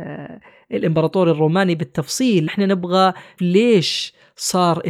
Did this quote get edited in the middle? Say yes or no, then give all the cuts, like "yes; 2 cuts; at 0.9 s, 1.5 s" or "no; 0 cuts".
yes; 2 cuts; at 2.5 s, 3.4 s